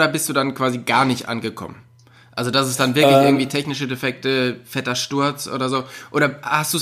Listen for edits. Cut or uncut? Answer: uncut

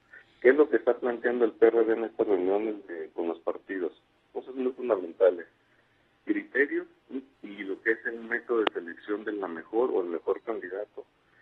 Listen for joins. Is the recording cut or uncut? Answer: cut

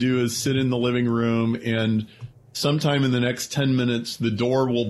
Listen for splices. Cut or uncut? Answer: uncut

